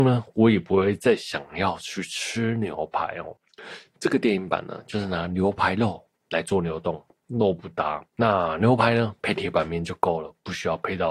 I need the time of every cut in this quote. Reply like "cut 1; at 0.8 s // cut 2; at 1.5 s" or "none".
cut 1; at 8.1 s